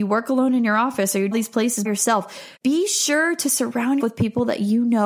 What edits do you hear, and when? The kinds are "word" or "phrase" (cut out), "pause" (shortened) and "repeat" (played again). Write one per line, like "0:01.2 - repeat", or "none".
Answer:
0:01.3 - phrase
0:01.9 - word
0:02.6 - pause
0:04.0 - word